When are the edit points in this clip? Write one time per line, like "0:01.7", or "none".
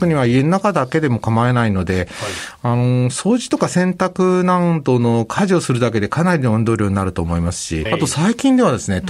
0:07.9